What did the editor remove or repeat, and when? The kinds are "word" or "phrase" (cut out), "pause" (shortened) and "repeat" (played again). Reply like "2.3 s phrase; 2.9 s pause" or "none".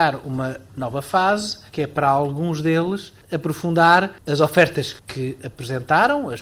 1.7 s pause